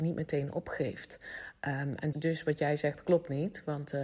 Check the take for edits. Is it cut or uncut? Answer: cut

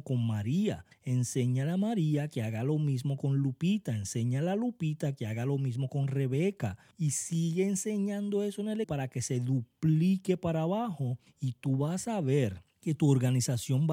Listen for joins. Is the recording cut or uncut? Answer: cut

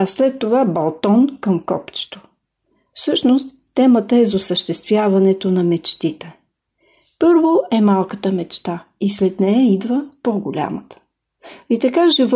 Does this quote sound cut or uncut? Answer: uncut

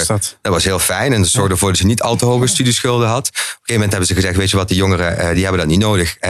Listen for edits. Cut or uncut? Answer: uncut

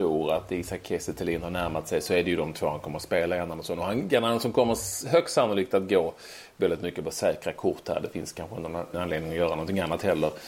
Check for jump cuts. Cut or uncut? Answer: cut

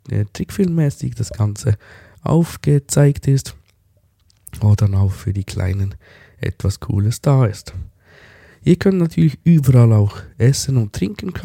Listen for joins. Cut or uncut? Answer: uncut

